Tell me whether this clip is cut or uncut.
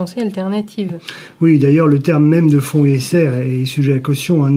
uncut